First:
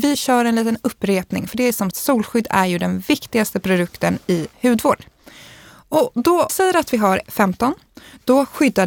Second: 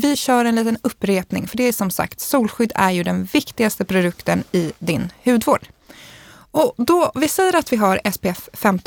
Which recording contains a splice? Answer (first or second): first